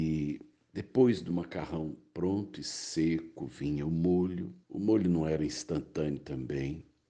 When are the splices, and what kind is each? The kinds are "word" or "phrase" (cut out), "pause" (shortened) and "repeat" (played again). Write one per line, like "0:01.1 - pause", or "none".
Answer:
0:04.6 - pause